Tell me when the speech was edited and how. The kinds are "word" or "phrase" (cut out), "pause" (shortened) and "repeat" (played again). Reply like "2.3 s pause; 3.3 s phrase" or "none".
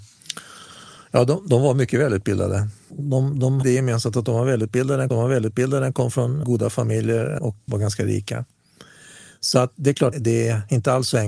2.9 s word; 3.6 s word; 5.1 s repeat; 6.4 s word; 7.4 s word; 7.7 s word; 10.1 s phrase